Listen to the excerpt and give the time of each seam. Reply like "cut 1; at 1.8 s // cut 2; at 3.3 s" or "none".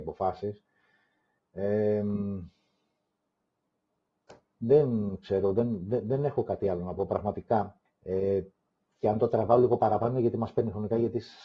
cut 1; at 7.9 s